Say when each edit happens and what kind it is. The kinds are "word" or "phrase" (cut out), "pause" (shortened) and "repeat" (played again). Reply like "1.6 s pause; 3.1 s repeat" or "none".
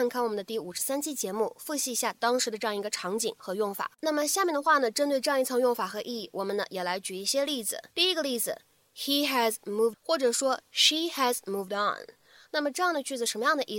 3.9 s pause; 7.9 s pause; 9.9 s word

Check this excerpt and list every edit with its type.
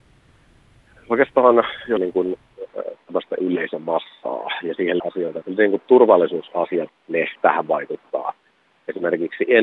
2.0 s word; 3.4 s word; 5.0 s word; 5.4 s word; 6.9 s word; 7.3 s word

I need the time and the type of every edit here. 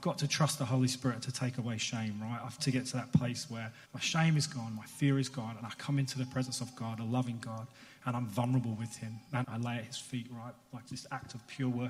2.6 s word; 3.8 s pause; 9.4 s word; 10.9 s word

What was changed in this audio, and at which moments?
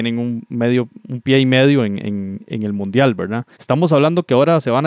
3.5 s pause

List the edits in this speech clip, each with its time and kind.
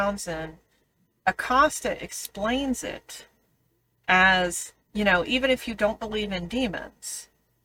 4.8 s pause

